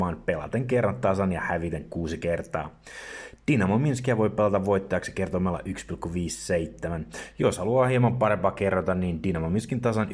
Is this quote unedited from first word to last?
yes; 0 cuts

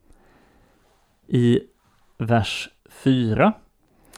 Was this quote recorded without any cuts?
no; 1 cut; at 2.8 s

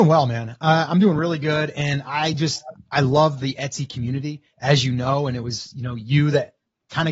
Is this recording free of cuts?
yes; 0 cuts

